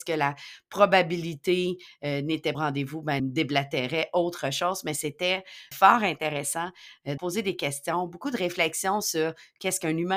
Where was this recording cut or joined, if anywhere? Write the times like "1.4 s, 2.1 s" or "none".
2.5 s, 3.2 s, 5.7 s, 7.2 s